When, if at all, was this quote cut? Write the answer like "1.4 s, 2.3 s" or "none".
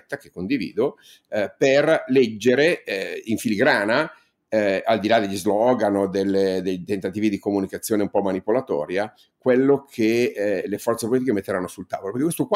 none